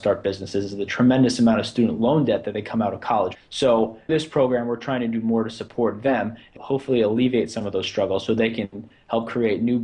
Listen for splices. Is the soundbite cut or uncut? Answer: cut